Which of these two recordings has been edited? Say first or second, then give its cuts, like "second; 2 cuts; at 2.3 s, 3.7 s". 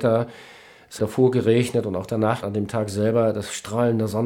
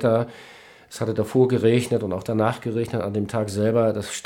first; 2 cuts; at 1.0 s, 2.4 s